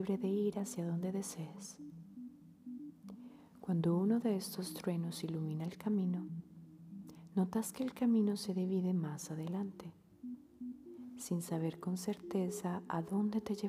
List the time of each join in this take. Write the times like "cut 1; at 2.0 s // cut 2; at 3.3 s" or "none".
none